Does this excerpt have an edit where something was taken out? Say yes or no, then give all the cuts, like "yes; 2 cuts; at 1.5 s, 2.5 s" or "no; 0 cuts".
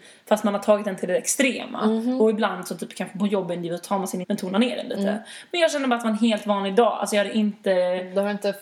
yes; 1 cut; at 4.2 s